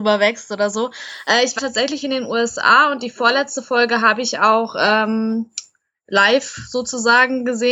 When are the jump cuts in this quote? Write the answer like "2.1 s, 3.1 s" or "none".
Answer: 1.6 s